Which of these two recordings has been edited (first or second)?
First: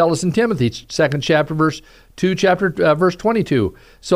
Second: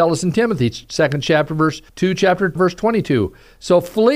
second